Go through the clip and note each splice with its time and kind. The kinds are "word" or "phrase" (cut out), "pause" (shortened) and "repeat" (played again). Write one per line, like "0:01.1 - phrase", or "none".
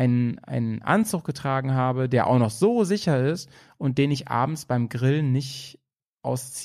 none